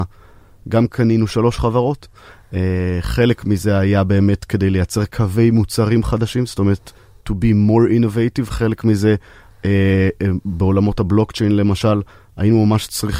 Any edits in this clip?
no; 0 cuts

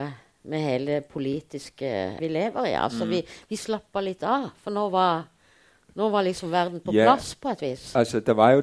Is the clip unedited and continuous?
no; 1 cut; at 2.2 s

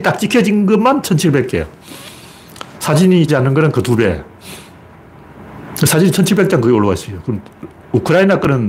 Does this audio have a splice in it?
yes; 1 cut; at 3.3 s

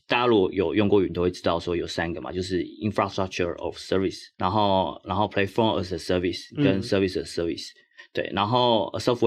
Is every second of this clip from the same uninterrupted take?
no; 1 cut; at 4.3 s

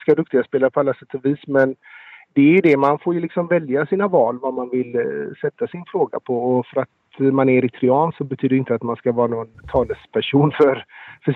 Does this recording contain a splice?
no; 0 cuts

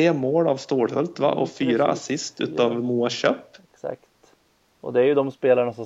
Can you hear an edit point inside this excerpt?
no; 0 cuts

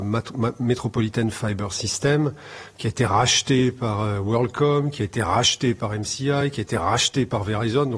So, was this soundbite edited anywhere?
no; 0 cuts

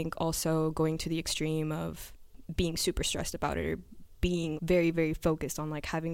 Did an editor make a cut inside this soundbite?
yes; 2 cuts; at 4.6 s, 4.9 s

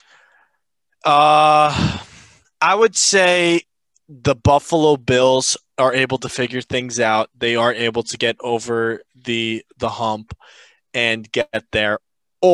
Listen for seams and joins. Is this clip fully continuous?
yes; 0 cuts

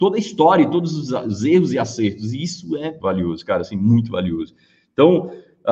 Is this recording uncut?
no; 1 cut; at 3.0 s

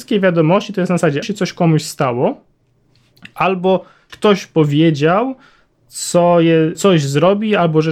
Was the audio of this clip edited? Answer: yes; 3 cuts; at 1.2 s, 4.1 s, 6.7 s

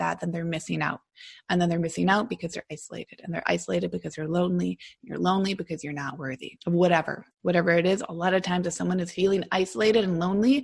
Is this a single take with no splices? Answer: no; 2 cuts; at 6.6 s, 7.3 s

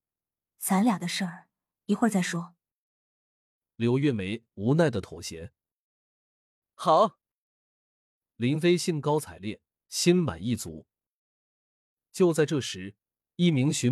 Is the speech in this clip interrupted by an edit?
no; 0 cuts

